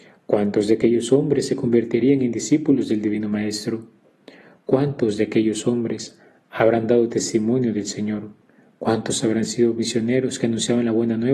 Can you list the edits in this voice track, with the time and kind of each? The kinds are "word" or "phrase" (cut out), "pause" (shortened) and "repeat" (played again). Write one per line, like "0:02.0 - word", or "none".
none